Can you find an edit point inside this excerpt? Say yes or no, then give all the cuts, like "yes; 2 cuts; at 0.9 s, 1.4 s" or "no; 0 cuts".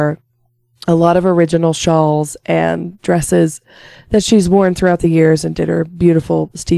no; 0 cuts